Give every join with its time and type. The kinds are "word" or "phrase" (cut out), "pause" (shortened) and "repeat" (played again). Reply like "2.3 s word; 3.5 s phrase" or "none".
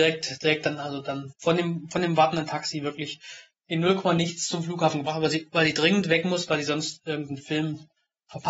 none